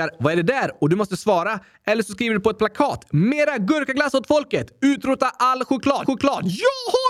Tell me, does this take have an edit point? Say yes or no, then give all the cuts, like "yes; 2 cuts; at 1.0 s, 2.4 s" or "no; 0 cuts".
yes; 1 cut; at 6.0 s